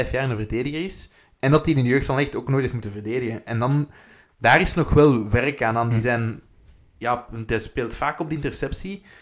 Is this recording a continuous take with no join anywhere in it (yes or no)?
yes